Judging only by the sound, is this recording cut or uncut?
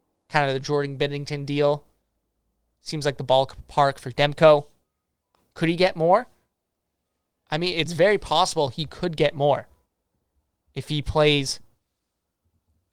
uncut